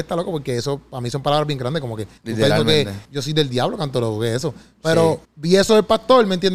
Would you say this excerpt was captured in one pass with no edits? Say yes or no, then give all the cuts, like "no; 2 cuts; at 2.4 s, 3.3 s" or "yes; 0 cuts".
no; 3 cuts; at 2.2 s, 3.0 s, 5.2 s